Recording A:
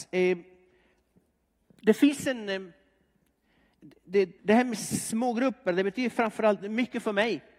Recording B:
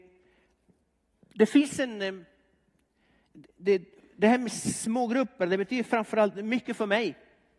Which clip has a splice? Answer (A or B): A